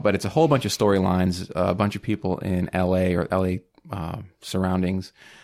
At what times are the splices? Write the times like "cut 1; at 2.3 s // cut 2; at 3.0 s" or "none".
none

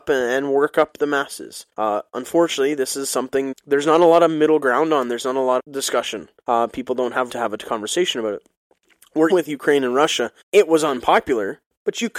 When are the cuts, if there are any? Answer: cut 1; at 1.7 s // cut 2; at 3.5 s // cut 3; at 5.6 s // cut 4; at 6.4 s // cut 5; at 7.3 s // cut 6; at 9.3 s // cut 7; at 10.4 s

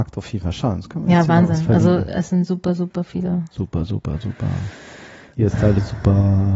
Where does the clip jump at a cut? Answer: none

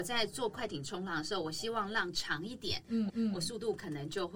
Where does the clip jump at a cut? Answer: cut 1; at 3.1 s

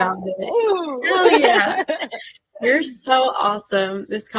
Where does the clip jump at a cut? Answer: none

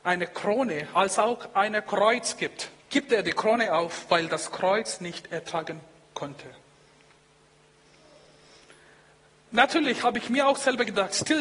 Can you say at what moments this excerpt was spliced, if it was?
cut 1; at 2.8 s

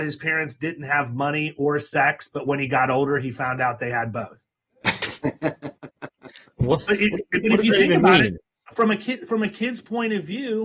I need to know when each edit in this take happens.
none

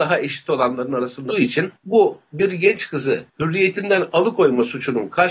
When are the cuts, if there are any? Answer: cut 1; at 1.3 s // cut 2; at 1.8 s // cut 3; at 3.3 s

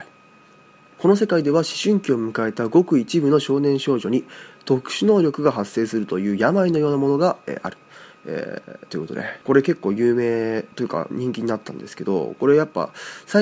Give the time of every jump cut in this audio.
cut 1; at 0.9 s // cut 2; at 9.4 s // cut 3; at 10.7 s

